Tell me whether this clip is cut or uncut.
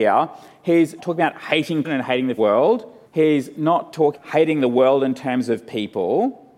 cut